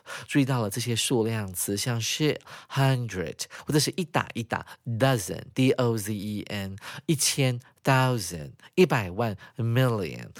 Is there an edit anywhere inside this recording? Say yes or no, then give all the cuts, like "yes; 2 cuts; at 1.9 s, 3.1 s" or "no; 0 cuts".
no; 0 cuts